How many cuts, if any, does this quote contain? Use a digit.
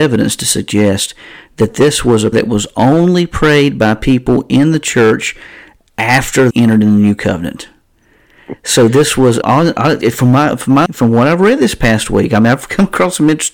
4